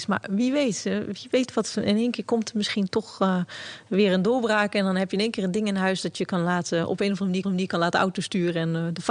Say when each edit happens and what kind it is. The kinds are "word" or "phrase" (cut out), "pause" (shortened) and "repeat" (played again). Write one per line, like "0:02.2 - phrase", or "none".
0:07.4 - repeat